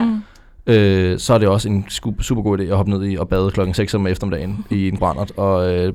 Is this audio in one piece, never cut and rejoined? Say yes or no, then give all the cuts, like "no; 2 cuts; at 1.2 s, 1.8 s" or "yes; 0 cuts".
no; 1 cut; at 5.0 s